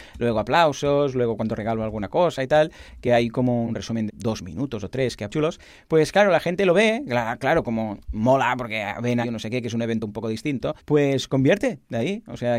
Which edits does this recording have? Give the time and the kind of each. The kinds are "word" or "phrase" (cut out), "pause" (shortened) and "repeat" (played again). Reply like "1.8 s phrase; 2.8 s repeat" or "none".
3.6 s word; 4.1 s word; 5.3 s phrase; 8.0 s pause; 9.2 s phrase; 10.8 s pause